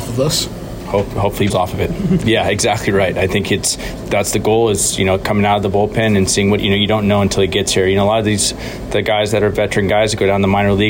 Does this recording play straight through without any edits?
no; 3 cuts; at 1.5 s, 4.0 s, 6.6 s

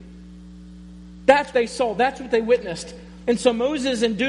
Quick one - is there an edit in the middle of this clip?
yes; 1 cut; at 1.5 s

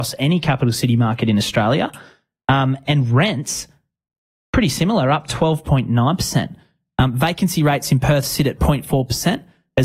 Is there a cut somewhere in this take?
no; 0 cuts

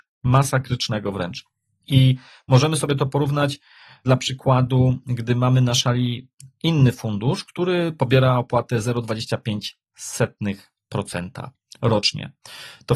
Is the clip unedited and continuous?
yes; 0 cuts

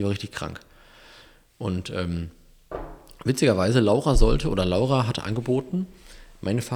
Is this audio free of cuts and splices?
yes; 0 cuts

